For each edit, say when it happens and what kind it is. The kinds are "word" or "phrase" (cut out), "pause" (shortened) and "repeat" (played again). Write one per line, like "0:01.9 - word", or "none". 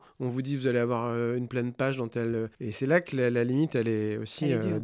0:02.5 - pause

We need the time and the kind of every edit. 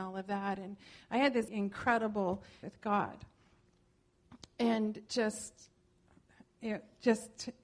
0:01.5 - word
0:02.6 - word
0:05.1 - word

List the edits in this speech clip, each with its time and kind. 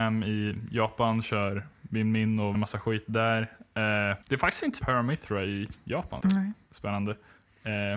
0:02.5 - word
0:04.2 - pause
0:04.8 - word
0:06.2 - phrase

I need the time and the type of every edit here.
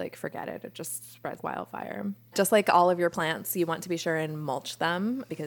0:01.4 - word

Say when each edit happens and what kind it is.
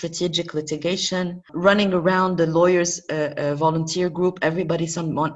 none

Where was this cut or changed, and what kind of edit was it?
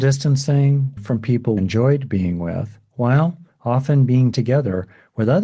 0:01.0 - phrase
0:01.6 - word
0:04.3 - word

